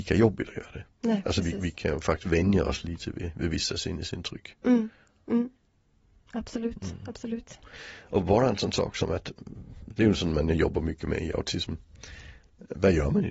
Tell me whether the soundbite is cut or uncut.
uncut